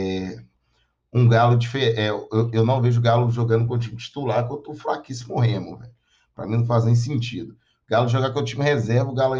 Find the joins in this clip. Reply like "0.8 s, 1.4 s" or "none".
none